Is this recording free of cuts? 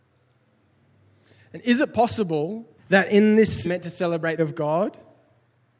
no; 3 cuts; at 2.8 s, 3.6 s, 4.4 s

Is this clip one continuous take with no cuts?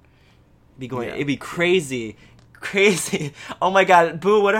yes; 0 cuts

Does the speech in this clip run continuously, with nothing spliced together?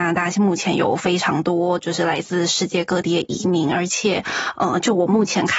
yes; 0 cuts

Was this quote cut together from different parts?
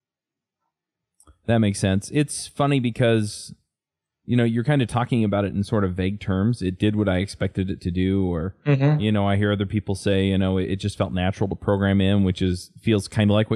no; 0 cuts

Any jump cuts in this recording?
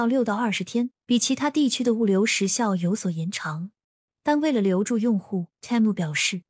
yes; 2 cuts; at 1.0 s, 3.8 s

